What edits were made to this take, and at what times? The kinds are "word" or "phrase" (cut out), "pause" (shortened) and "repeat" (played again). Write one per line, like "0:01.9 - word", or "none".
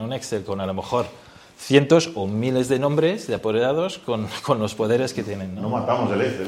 none